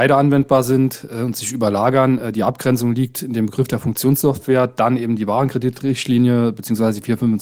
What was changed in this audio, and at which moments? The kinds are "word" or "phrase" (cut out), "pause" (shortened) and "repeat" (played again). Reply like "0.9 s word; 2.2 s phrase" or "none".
none